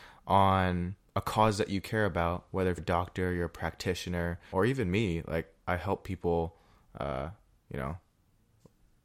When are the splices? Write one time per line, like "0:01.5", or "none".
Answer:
0:02.8
0:04.5